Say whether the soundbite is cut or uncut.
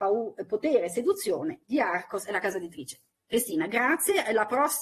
uncut